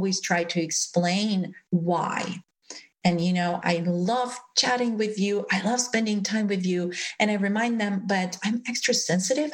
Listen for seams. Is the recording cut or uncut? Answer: cut